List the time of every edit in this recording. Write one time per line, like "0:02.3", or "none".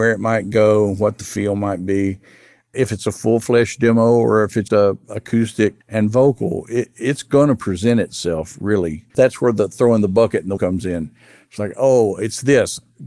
0:04.7
0:05.8
0:09.1
0:10.6